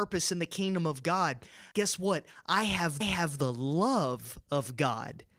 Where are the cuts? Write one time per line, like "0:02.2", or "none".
0:01.7
0:03.0